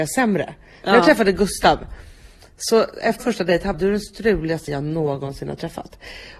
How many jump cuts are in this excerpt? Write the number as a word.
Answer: three